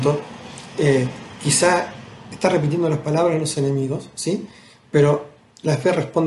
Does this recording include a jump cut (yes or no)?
no